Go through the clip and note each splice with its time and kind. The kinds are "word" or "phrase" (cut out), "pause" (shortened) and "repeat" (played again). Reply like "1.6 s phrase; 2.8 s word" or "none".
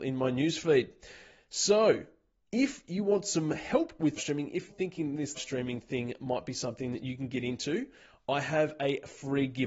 4.2 s word; 4.7 s word; 5.3 s word